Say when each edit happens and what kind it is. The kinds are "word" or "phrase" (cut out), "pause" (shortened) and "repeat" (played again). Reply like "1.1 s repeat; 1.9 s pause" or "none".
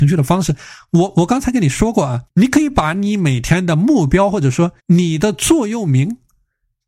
2.3 s pause; 4.8 s pause